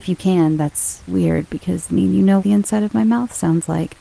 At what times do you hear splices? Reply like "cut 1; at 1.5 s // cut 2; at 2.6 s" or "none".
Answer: cut 1; at 1.1 s // cut 2; at 1.9 s // cut 3; at 2.4 s